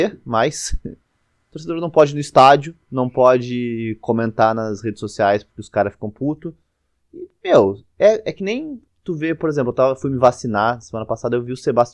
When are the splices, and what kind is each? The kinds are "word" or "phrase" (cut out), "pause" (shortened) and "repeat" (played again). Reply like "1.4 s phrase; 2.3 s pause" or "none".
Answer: 7.9 s pause; 8.9 s pause

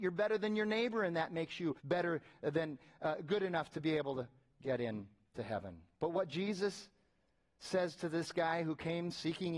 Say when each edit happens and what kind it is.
1.8 s pause

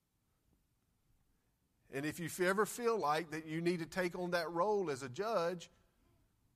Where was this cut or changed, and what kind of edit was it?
none

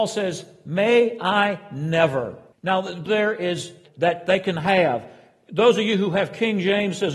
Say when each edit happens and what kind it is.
2.5 s pause; 3.1 s phrase; 3.9 s phrase

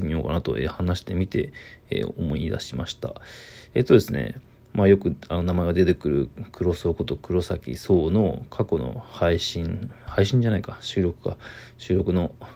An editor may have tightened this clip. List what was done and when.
none

